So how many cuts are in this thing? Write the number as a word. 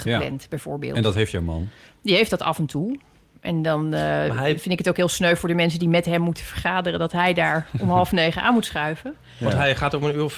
zero